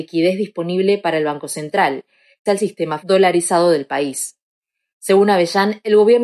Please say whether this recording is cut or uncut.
cut